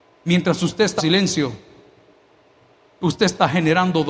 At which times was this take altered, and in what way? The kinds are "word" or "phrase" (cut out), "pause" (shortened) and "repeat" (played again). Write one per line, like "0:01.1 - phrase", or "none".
0:01.0 - word